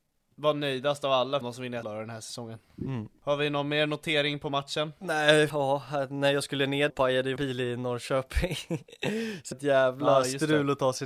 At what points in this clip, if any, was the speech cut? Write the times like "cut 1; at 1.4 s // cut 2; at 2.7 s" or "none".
cut 1; at 1.4 s // cut 2; at 1.8 s // cut 3; at 5.5 s // cut 4; at 6.9 s // cut 5; at 7.4 s // cut 6; at 9.5 s